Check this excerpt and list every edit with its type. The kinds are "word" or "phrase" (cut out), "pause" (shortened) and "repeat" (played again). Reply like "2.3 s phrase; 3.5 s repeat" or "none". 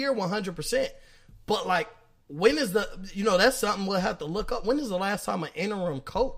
none